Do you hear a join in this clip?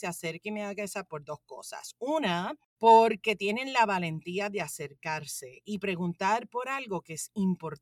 yes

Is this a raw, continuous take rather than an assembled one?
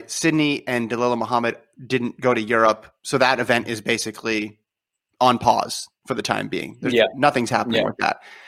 yes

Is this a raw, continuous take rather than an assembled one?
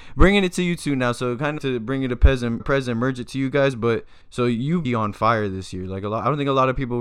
no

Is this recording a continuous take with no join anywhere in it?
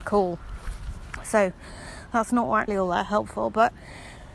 no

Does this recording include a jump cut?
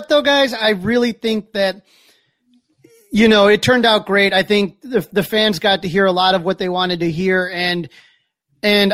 no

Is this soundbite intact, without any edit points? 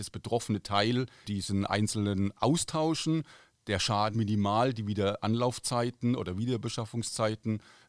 no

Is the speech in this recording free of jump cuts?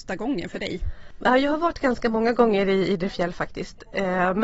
yes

